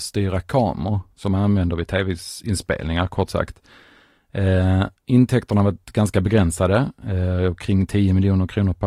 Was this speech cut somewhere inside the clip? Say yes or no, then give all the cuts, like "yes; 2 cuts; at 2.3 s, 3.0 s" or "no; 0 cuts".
no; 0 cuts